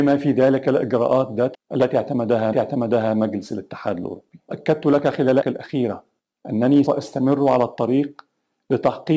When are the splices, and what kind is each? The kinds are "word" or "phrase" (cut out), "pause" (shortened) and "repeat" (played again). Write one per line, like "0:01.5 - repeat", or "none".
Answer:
0:01.5 - word
0:02.5 - repeat
0:04.5 - word
0:05.4 - word
0:06.9 - word